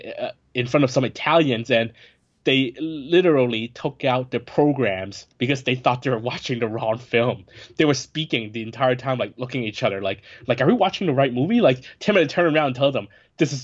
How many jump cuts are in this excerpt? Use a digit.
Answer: 0